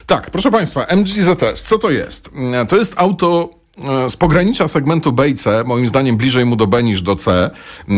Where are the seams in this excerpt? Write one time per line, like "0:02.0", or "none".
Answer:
none